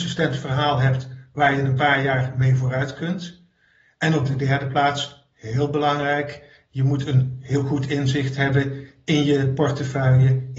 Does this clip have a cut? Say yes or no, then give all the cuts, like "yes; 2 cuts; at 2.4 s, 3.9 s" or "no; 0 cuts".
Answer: no; 0 cuts